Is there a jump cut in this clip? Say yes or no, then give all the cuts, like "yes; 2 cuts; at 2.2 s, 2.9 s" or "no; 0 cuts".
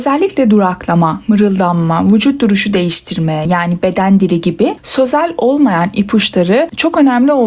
no; 0 cuts